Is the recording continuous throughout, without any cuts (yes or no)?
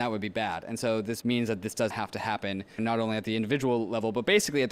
no